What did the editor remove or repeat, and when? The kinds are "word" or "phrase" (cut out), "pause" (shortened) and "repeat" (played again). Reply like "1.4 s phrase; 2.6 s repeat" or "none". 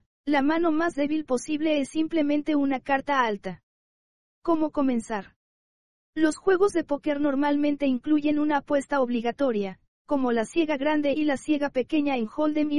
none